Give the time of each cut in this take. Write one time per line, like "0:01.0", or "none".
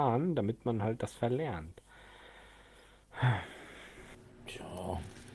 0:01.2